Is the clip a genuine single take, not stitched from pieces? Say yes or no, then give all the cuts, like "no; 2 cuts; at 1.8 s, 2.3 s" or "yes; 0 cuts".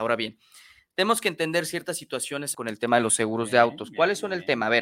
no; 1 cut; at 2.5 s